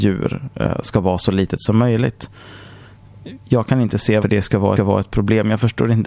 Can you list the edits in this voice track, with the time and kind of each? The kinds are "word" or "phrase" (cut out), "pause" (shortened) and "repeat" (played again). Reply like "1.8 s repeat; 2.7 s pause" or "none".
4.2 s word; 4.8 s repeat